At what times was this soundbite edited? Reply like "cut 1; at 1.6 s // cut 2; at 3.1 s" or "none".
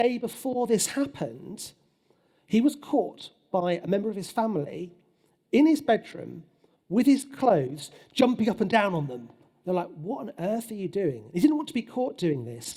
none